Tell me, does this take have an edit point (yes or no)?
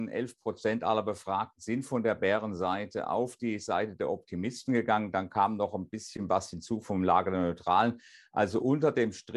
no